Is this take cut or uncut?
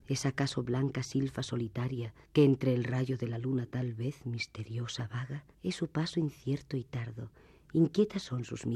cut